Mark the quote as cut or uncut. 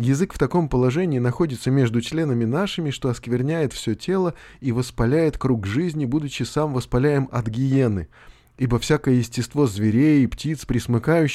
uncut